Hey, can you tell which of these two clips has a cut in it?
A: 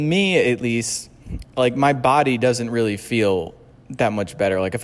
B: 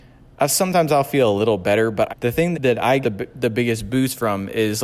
B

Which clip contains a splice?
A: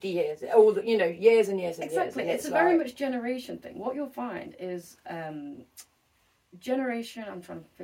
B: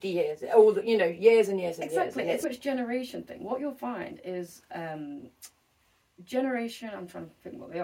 B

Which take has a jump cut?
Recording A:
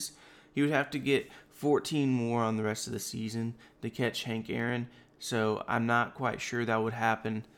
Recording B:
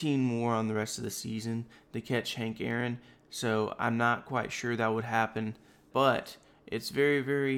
B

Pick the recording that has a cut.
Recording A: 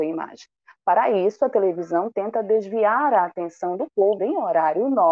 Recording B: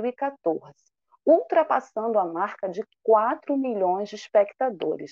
A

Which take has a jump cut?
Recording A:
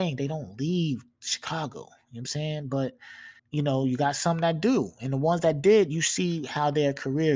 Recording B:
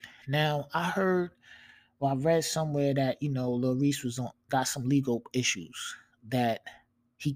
A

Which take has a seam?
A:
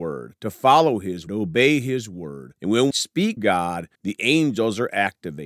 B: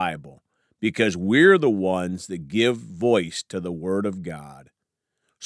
A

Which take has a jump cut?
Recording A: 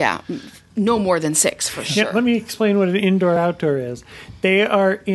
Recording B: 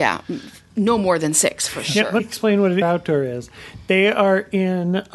B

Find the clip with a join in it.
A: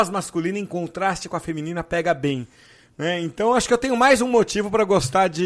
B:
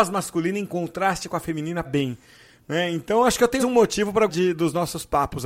B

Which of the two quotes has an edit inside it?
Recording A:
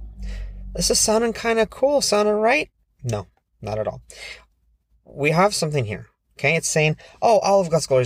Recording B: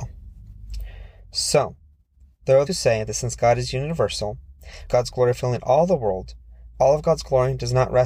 B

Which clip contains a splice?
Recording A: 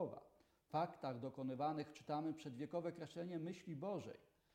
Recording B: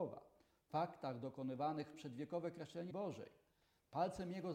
B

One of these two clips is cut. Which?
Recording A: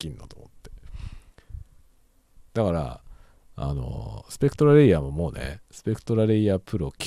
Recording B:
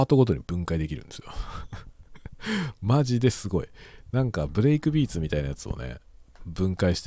A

